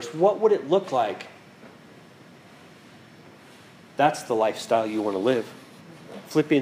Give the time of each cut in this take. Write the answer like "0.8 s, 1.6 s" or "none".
none